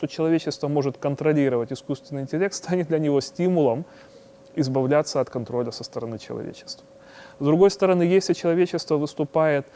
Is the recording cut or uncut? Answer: uncut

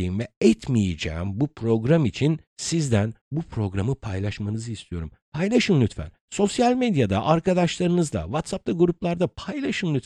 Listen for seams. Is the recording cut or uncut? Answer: uncut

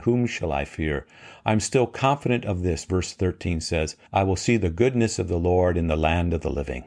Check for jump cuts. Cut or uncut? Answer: cut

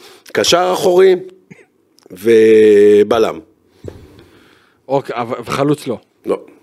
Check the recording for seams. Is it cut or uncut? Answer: uncut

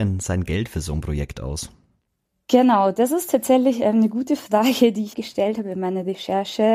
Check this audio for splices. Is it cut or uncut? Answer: cut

